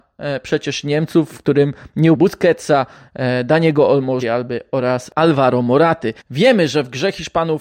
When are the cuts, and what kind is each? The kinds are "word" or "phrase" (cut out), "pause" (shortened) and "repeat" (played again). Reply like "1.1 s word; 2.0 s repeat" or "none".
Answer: 2.1 s word; 4.2 s word; 6.2 s pause